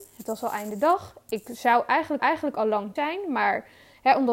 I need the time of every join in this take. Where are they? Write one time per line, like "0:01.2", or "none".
0:02.2
0:03.0